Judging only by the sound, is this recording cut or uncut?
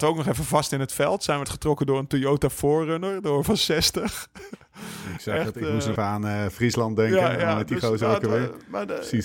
cut